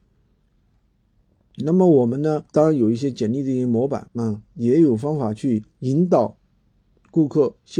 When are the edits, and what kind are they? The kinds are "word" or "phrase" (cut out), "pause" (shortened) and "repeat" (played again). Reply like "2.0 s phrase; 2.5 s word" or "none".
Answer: 2.5 s pause; 4.1 s pause; 5.7 s pause